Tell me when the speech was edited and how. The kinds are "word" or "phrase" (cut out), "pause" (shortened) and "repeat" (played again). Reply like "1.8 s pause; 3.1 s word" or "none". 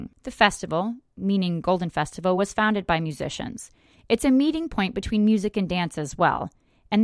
none